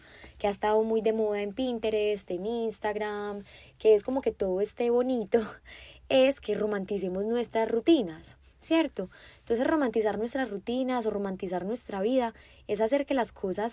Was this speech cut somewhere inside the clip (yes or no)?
no